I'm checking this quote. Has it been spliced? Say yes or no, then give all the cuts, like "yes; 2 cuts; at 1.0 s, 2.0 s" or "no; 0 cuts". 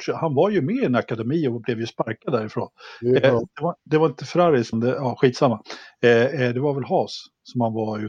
yes; 2 cuts; at 3.8 s, 4.7 s